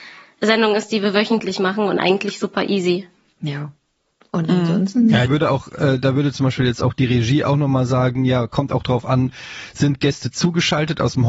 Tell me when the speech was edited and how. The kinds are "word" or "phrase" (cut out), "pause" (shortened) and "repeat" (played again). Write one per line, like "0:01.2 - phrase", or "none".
0:05.3 - phrase

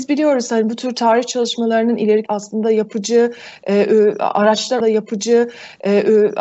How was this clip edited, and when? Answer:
0:02.3 - phrase
0:04.8 - repeat

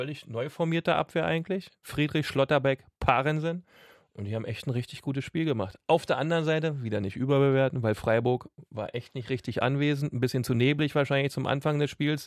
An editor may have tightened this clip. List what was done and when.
none

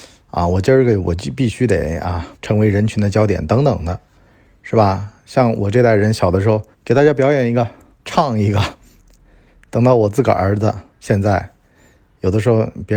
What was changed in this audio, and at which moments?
0:02.3 - pause
0:06.7 - pause
0:08.0 - phrase
0:10.9 - pause

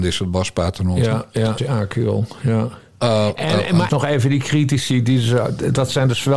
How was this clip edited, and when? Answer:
0:01.6 - phrase
0:03.9 - phrase

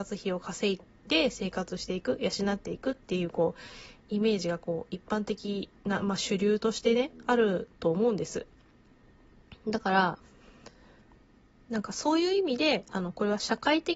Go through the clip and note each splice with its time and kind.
0:05.8 - pause

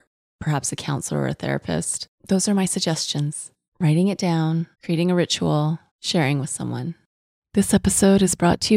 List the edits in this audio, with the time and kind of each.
0:02.2 - pause
0:03.7 - pause
0:04.7 - pause
0:05.9 - pause

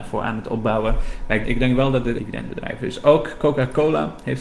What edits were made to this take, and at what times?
0:01.4 - phrase
0:02.2 - phrase

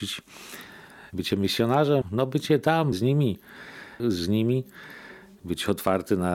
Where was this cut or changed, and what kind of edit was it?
0:02.0 - word
0:02.9 - word
0:04.0 - word

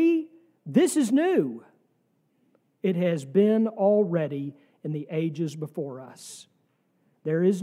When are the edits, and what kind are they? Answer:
none

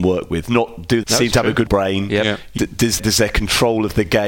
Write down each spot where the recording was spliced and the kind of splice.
0:01.0 - word
0:01.7 - word
0:02.6 - word
0:03.0 - word

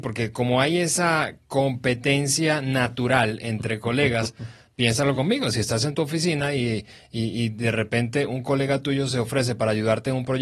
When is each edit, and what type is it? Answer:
none

